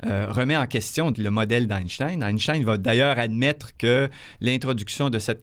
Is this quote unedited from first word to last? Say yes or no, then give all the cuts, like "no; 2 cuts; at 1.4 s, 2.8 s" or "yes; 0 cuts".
no; 1 cut; at 1.1 s